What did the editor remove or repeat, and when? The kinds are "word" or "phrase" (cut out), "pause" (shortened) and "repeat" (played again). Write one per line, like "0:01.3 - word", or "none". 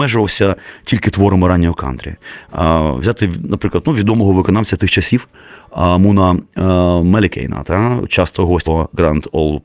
0:08.7 - word